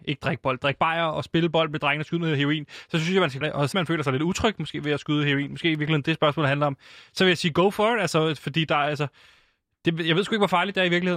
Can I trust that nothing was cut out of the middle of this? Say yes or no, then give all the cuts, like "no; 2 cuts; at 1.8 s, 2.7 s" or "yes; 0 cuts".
no; 2 cuts; at 3.4 s, 3.7 s